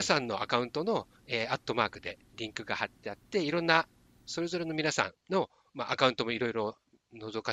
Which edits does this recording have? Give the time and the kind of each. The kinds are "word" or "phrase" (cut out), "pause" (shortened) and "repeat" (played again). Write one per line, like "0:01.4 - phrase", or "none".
0:01.2 - pause
0:05.2 - pause